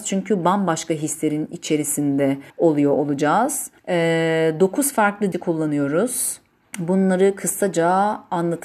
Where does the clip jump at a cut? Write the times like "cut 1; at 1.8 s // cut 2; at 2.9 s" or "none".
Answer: cut 1; at 2.5 s // cut 2; at 3.8 s // cut 3; at 5.3 s // cut 4; at 6.6 s